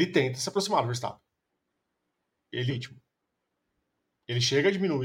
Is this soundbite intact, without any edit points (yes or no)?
no